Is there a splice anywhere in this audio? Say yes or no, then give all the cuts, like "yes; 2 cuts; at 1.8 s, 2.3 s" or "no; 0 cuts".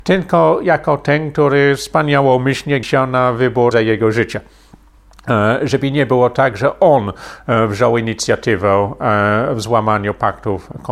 yes; 2 cuts; at 2.8 s, 3.7 s